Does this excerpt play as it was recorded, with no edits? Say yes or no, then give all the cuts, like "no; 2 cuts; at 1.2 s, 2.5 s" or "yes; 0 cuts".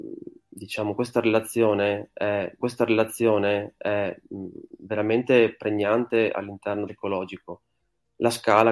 no; 2 cuts; at 2.6 s, 6.9 s